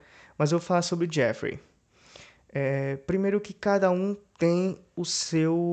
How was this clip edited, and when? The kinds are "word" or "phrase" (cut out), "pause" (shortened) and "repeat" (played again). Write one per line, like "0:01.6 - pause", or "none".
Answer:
none